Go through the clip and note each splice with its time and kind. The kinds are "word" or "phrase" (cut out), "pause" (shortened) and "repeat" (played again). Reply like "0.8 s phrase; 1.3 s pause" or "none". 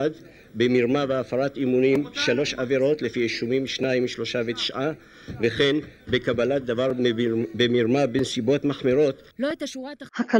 9.3 s pause